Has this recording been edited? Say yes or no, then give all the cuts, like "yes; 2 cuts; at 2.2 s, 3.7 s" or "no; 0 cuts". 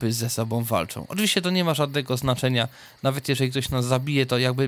no; 0 cuts